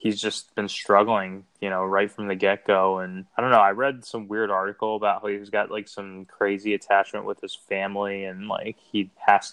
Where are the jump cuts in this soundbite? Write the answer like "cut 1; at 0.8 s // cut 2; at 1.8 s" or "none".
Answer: cut 1; at 3.3 s